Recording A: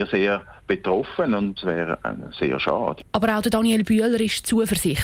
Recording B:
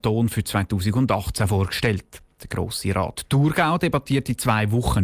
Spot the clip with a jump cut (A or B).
A